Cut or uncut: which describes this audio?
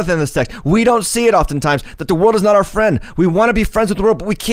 uncut